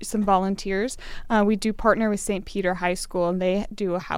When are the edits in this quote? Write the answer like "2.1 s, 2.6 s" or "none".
none

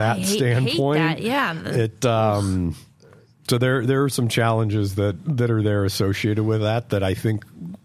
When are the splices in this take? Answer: none

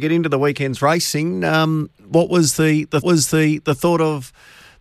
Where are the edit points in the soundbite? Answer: 3.0 s

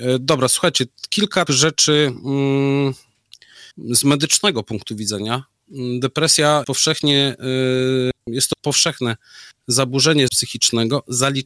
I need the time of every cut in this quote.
1.5 s, 3.7 s, 6.6 s, 8.2 s, 10.3 s

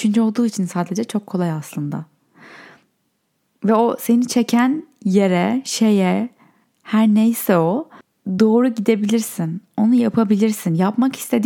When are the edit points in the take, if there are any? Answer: none

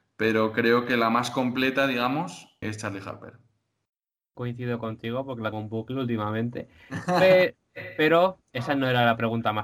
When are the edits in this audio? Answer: 2.6 s, 5.5 s

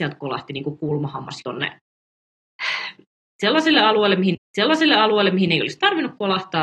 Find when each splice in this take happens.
1.4 s, 4.3 s

